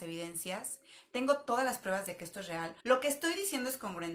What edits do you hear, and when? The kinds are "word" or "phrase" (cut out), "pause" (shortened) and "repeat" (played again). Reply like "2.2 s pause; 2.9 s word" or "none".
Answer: 2.8 s pause